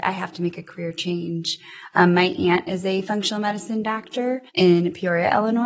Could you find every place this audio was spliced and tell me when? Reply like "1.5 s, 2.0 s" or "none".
4.5 s